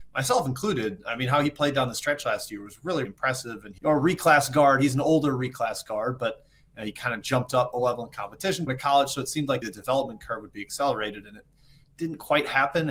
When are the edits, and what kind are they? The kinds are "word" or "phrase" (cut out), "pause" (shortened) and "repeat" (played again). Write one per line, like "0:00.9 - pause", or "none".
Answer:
0:03.0 - word
0:03.8 - word
0:08.7 - word
0:09.6 - word